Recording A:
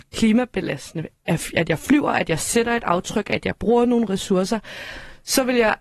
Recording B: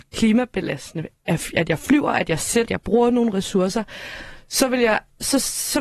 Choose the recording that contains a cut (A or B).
B